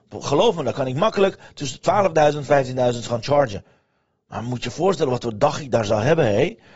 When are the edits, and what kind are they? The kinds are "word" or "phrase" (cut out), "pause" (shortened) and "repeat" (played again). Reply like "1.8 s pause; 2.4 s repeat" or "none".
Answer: none